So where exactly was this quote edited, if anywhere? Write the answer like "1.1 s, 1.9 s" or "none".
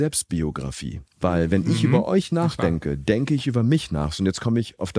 1.1 s